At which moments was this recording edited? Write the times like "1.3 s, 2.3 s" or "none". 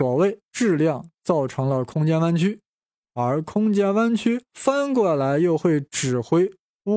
none